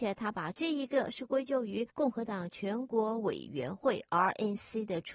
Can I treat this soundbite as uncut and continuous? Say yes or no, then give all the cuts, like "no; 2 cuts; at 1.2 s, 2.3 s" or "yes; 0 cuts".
no; 1 cut; at 1.9 s